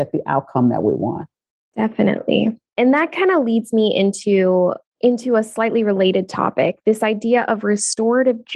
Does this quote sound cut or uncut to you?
uncut